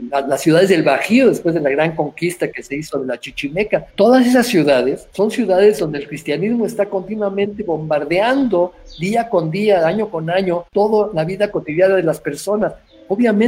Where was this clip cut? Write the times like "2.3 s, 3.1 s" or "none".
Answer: 3.9 s, 5.1 s, 10.7 s